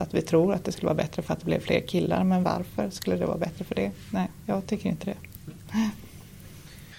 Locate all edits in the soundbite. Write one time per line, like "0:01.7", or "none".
none

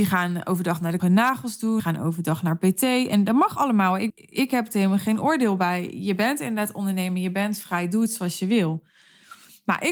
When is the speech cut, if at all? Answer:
0:01.0
0:01.8
0:04.1

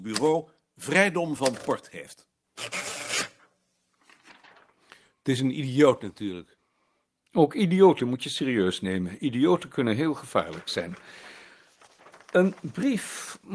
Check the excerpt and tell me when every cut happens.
none

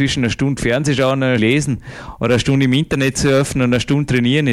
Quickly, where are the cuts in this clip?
0:01.4

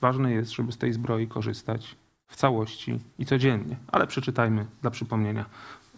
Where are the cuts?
0:03.1

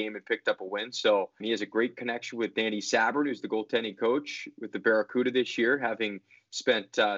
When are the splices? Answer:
0:01.4

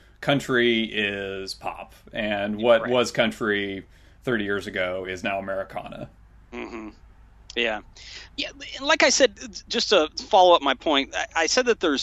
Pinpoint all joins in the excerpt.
none

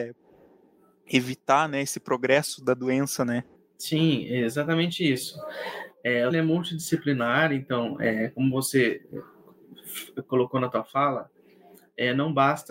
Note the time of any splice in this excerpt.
0:03.6
0:06.3

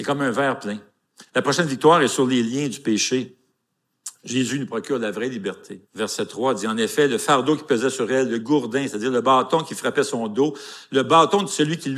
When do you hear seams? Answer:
0:01.3
0:05.8

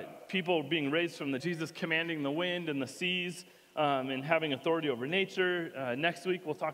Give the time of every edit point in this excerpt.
0:01.4

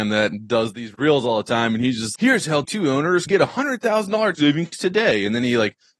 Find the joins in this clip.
0:02.2
0:02.6
0:03.3
0:04.3

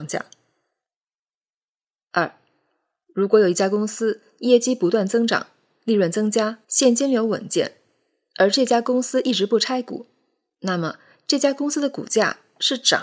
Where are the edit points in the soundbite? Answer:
0:06.6

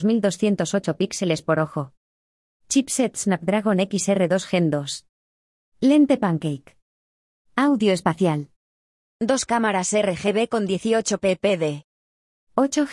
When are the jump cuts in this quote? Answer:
none

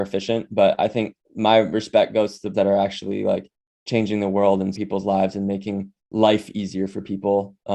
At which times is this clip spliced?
0:01.2
0:02.5
0:04.7
0:06.0

